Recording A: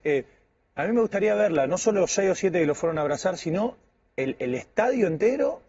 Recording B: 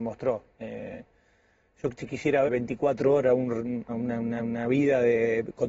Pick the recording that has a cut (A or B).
B